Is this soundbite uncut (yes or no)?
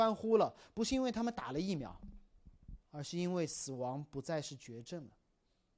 no